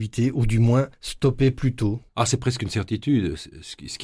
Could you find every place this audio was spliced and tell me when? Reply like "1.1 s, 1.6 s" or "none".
0.9 s, 2.1 s